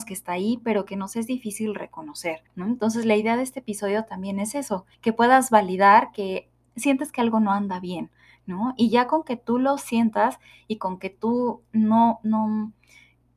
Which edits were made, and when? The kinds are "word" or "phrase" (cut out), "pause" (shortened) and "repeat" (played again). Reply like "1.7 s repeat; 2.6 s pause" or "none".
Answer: 2.5 s pause; 4.9 s pause